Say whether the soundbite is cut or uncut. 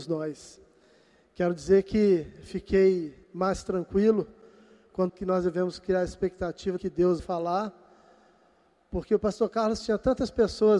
cut